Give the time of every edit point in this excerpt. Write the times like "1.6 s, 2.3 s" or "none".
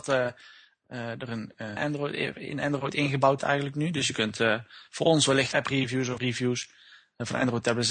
1.8 s, 3.4 s, 5.5 s, 6.2 s

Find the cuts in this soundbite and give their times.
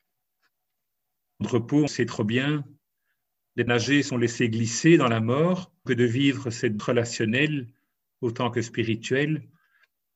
1.4 s, 1.9 s, 3.7 s, 4.1 s, 5.9 s, 6.8 s

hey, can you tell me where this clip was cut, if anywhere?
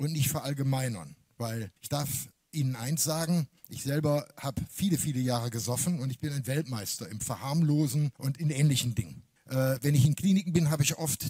1.8 s, 3.6 s, 8.1 s, 9.4 s

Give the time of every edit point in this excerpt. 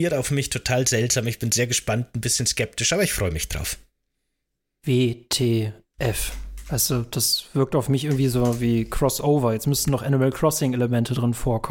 none

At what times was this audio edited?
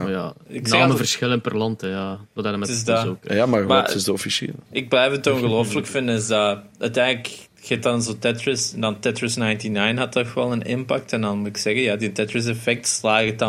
4.7 s

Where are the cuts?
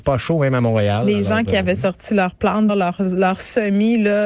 2.7 s

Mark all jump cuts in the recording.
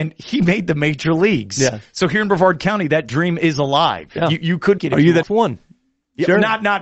4.8 s, 5.2 s

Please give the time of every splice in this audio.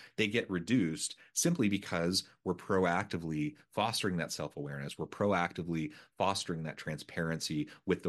none

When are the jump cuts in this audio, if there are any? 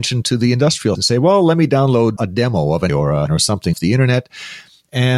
0.9 s, 2.2 s, 2.9 s, 3.3 s, 3.7 s

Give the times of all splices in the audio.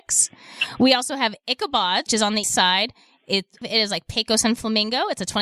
2.1 s, 2.4 s, 3.6 s

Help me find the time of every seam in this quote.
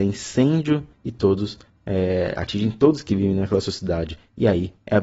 0.9 s

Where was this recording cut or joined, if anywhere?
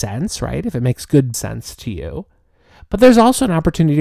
1.3 s

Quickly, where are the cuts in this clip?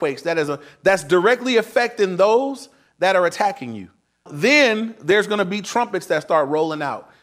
none

